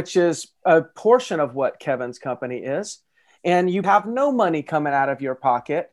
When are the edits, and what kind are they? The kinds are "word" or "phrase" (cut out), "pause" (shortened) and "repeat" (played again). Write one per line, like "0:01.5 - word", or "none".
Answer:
0:03.8 - word